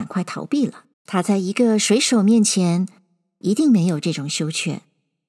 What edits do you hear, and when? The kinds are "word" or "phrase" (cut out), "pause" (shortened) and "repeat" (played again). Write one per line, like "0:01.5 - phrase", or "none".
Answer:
0:00.9 - pause